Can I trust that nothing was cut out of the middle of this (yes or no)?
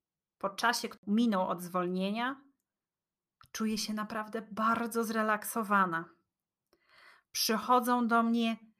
yes